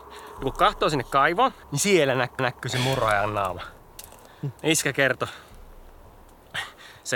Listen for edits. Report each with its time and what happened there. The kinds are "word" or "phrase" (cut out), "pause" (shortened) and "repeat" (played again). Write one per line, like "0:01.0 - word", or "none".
0:01.6 - pause
0:02.4 - repeat
0:04.6 - pause

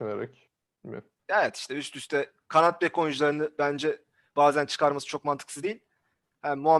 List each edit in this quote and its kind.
0:01.2 - pause

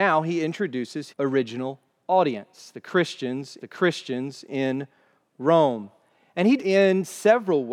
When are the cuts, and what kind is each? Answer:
0:01.1 - word
0:03.6 - repeat
0:06.6 - phrase

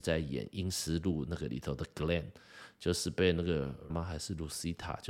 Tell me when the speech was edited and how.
0:03.9 - word

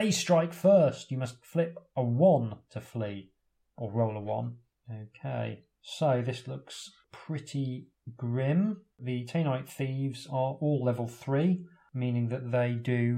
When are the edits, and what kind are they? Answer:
none

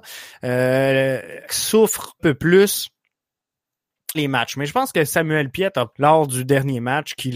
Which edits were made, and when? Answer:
0:01.5 - word
0:02.2 - word
0:04.1 - word
0:05.9 - word

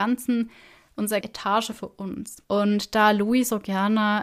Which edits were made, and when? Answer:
0:01.2 - word
0:02.4 - pause

